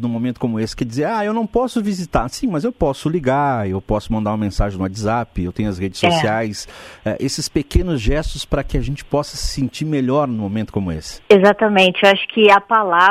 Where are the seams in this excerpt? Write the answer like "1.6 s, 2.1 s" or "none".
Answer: 11.3 s